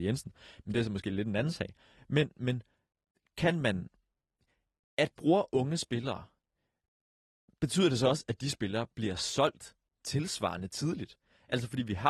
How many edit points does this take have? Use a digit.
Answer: 1